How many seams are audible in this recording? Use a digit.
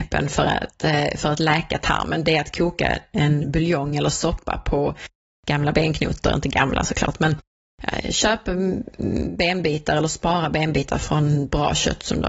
0